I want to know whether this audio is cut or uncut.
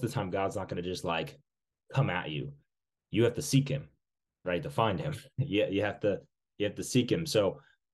uncut